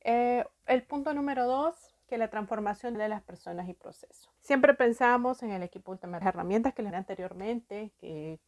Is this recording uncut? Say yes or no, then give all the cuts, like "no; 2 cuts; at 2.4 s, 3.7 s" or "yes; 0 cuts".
no; 5 cuts; at 2.0 s, 2.9 s, 4.4 s, 6.2 s, 6.9 s